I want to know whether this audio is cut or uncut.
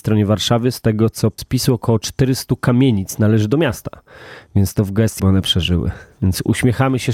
cut